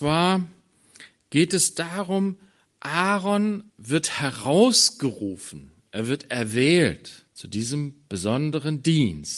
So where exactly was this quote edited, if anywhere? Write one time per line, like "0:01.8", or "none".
0:03.7
0:07.3